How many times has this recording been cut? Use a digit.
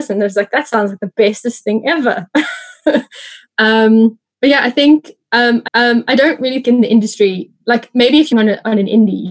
4